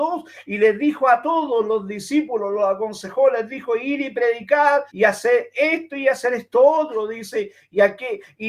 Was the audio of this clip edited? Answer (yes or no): yes